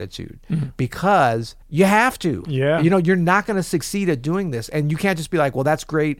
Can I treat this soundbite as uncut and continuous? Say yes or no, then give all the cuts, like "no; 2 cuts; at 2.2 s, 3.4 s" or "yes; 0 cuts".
no; 1 cut; at 1.6 s